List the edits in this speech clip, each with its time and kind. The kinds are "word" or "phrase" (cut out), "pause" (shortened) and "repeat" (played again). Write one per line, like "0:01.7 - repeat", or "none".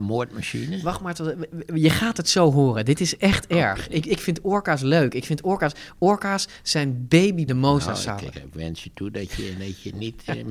0:07.5 - phrase
0:08.3 - word